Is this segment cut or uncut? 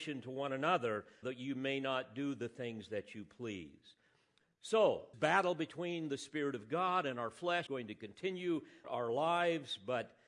cut